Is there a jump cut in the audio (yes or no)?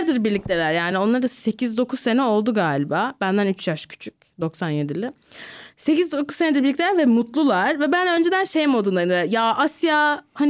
no